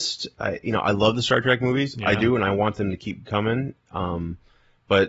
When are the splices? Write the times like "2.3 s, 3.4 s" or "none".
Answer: none